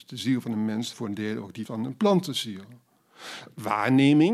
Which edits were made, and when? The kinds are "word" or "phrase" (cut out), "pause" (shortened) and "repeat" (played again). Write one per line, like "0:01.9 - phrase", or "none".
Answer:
0:00.9 - word
0:01.7 - word